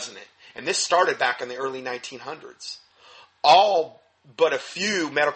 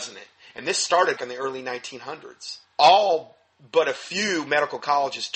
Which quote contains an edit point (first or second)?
second